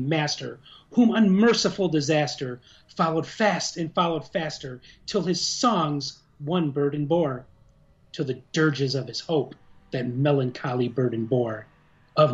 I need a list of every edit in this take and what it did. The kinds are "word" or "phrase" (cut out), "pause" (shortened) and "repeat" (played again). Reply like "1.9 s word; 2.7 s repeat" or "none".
none